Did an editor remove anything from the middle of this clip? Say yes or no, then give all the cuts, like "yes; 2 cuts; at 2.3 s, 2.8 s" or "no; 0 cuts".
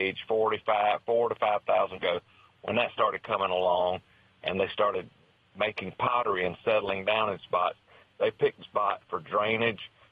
yes; 2 cuts; at 2.0 s, 8.6 s